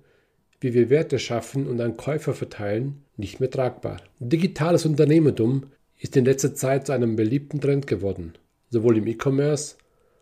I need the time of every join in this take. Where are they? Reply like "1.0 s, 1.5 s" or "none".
3.1 s, 4.1 s, 5.7 s